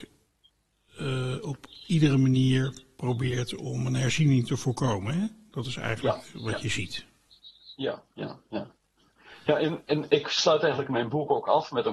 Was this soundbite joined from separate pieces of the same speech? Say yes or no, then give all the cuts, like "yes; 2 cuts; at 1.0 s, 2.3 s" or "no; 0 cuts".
no; 0 cuts